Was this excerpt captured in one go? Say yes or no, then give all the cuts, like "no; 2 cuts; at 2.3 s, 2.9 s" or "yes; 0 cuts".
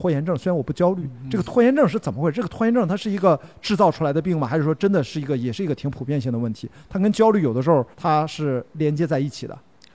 no; 1 cut; at 7.9 s